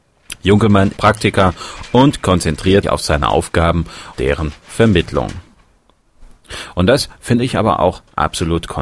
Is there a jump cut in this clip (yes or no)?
yes